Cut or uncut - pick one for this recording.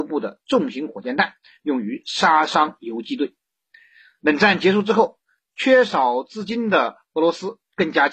uncut